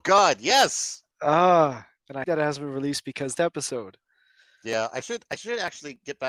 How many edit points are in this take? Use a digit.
3